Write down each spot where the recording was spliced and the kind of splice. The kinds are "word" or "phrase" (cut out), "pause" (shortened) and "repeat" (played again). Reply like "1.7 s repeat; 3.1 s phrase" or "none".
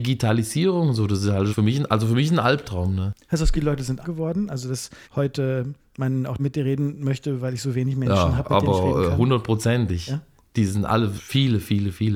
1.5 s word; 3.5 s word; 4.0 s word; 5.0 s pause; 6.4 s phrase; 11.2 s word